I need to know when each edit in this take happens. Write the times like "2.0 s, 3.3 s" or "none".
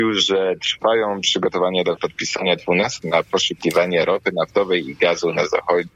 2.0 s, 3.0 s